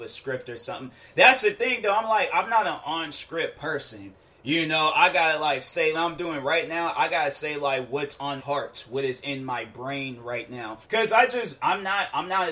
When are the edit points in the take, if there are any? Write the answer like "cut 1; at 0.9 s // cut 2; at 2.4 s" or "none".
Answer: cut 1; at 5.9 s // cut 2; at 8.4 s // cut 3; at 10.8 s

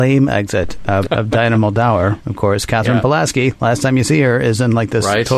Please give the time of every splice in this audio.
cut 1; at 1.1 s

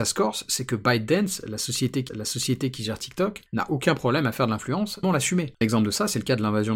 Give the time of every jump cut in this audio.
cut 1; at 2.1 s // cut 2; at 5.0 s // cut 3; at 5.6 s

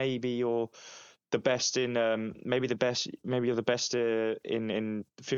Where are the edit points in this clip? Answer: none

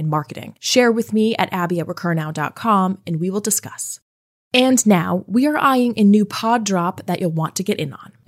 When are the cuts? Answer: none

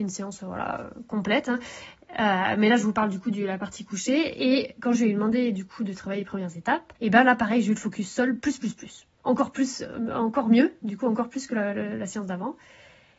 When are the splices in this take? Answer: cut 1; at 7.0 s // cut 2; at 9.1 s

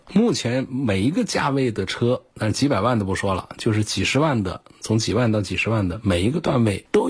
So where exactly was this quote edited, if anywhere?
cut 1; at 2.3 s

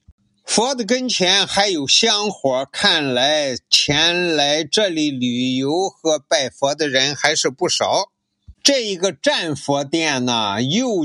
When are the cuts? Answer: cut 1; at 8.5 s

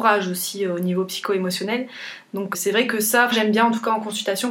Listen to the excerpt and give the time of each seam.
cut 1; at 2.5 s // cut 2; at 3.3 s

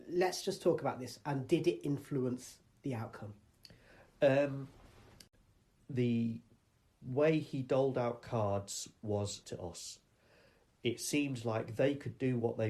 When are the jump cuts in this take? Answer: cut 1; at 9.4 s

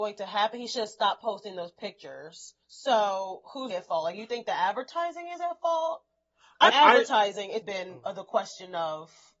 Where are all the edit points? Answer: cut 1; at 2.6 s // cut 2; at 3.7 s // cut 3; at 6.7 s // cut 4; at 7.6 s

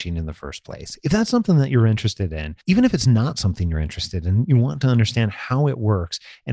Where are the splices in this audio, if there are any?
cut 1; at 2.6 s

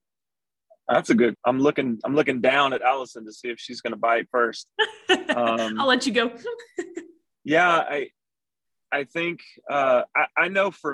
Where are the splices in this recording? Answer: cut 1; at 1.3 s

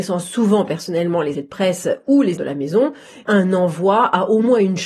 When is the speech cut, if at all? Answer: cut 1; at 1.3 s // cut 2; at 2.4 s // cut 3; at 3.3 s

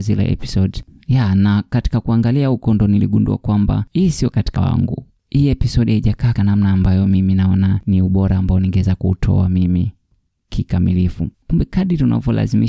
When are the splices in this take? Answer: cut 1; at 4.6 s // cut 2; at 6.4 s

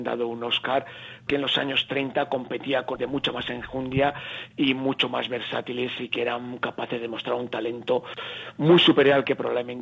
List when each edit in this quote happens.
cut 1; at 1.3 s // cut 2; at 3.0 s

